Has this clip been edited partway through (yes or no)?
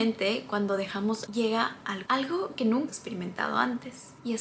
yes